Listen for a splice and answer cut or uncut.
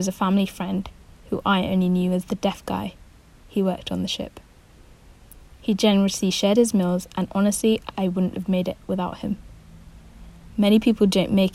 uncut